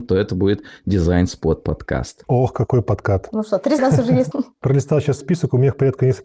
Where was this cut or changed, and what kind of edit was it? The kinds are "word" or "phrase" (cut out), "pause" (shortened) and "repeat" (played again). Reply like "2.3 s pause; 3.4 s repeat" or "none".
3.8 s word; 4.3 s word; 5.2 s word